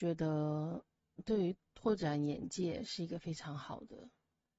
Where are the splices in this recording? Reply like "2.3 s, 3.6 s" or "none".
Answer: 1.2 s